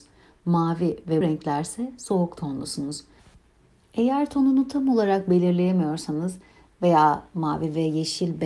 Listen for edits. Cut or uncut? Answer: cut